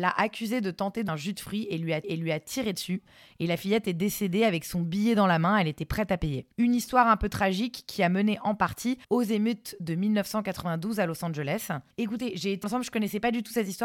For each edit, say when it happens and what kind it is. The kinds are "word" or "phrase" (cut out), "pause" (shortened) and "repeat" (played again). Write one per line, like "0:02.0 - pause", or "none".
0:01.1 - word
0:02.0 - repeat
0:06.5 - pause
0:09.0 - pause
0:11.9 - pause
0:12.6 - word

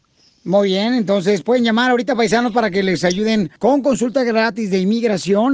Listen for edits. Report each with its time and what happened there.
0:03.6 - pause

